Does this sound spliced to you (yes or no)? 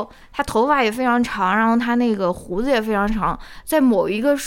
no